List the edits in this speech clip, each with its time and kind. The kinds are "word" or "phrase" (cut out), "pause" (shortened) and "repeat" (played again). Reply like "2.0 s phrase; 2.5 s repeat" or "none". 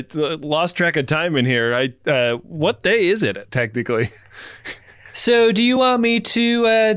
none